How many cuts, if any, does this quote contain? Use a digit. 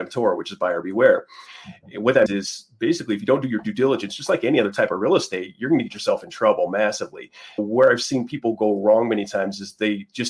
2